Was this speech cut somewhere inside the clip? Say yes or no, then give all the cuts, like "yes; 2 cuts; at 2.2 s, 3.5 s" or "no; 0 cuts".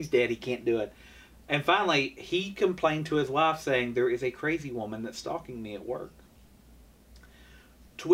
no; 0 cuts